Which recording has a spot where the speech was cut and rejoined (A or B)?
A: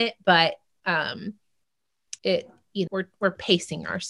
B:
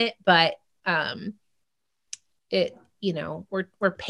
A